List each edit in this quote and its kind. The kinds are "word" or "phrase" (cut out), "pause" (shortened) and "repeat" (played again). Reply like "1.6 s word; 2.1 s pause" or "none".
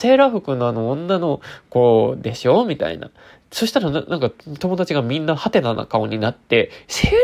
none

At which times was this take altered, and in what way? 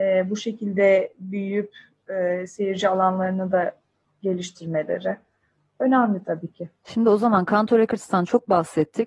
none

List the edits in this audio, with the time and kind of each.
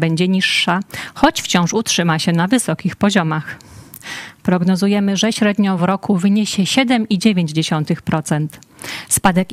none

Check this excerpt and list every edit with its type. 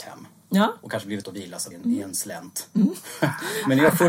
1.2 s word; 1.7 s word

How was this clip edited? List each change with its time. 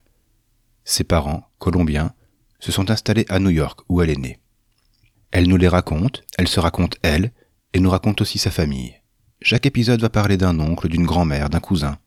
6.3 s pause; 9.2 s pause

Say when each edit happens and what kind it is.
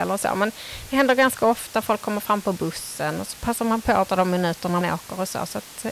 4.1 s word; 4.8 s word

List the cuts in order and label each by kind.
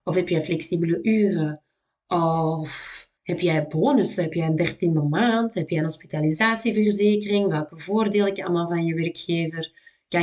3.2 s pause; 8.4 s word

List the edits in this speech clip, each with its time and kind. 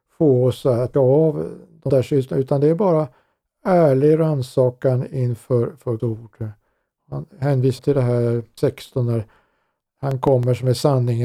0.9 s word; 1.9 s word; 5.1 s word; 6.0 s word; 7.8 s word; 8.6 s word

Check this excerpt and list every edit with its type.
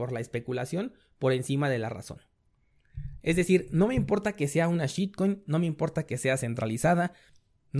none

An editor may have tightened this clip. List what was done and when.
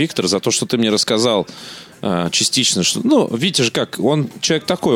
none

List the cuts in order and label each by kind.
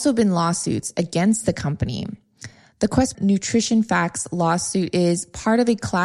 3.1 s word

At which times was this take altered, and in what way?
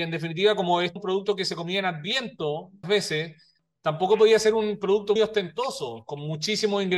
1.0 s word; 2.8 s word; 5.2 s word

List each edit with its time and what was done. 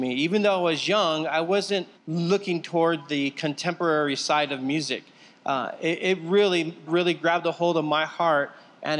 1.9 s pause; 6.9 s word

